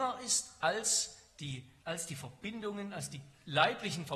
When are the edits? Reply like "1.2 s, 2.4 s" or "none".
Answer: 1.8 s

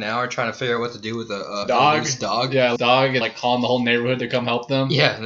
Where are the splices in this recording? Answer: 1.6 s, 2.8 s, 3.2 s

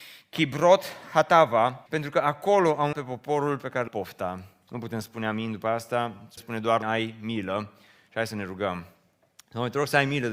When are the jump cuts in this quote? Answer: 1.9 s, 2.9 s, 3.9 s, 6.4 s, 6.8 s

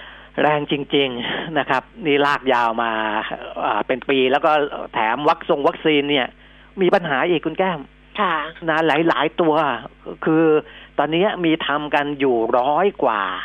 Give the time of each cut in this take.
none

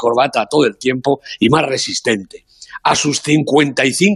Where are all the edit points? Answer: none

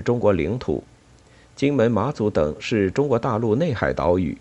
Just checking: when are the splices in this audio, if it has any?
none

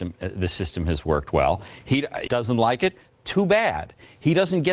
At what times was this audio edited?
2.3 s

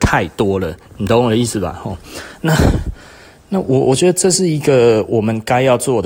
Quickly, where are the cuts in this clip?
none

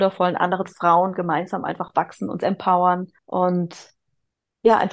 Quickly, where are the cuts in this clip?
3.2 s

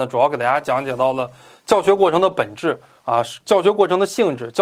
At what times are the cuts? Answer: none

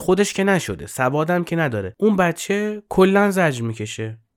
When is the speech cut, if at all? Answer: none

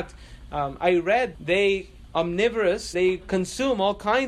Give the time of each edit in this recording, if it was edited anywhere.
1.3 s, 2.1 s, 2.9 s

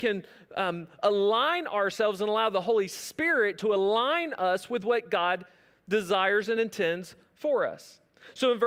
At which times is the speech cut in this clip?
none

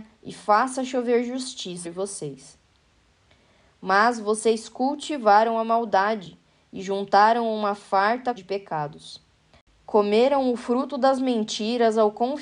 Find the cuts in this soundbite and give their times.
1.8 s, 8.4 s

